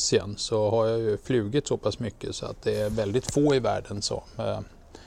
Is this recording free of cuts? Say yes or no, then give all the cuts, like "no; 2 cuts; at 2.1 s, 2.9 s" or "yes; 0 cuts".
yes; 0 cuts